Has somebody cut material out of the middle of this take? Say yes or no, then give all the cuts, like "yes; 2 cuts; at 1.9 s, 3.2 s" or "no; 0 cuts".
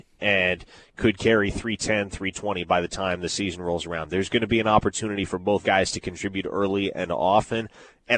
yes; 1 cut; at 5.6 s